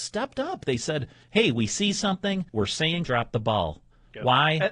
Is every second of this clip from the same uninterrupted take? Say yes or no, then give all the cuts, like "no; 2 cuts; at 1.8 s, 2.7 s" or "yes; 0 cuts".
no; 2 cuts; at 2.5 s, 3.0 s